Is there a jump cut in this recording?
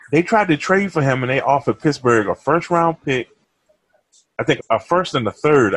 yes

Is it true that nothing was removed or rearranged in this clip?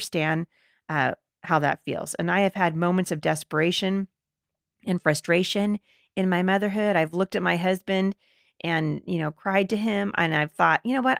yes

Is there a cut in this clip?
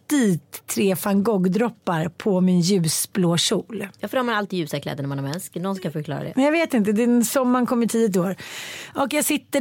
no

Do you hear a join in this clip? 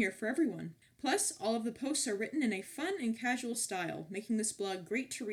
no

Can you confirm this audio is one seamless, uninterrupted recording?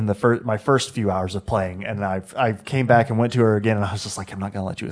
yes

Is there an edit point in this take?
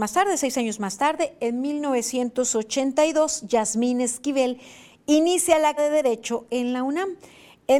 yes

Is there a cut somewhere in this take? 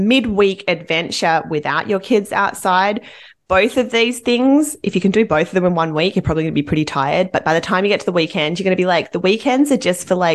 no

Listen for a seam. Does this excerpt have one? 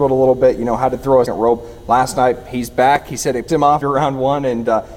yes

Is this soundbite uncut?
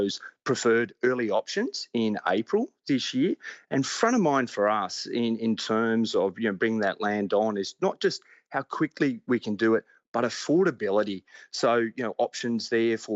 yes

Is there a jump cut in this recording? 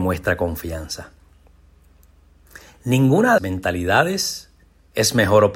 yes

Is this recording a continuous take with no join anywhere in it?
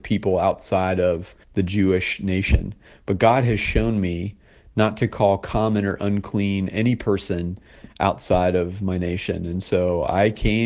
no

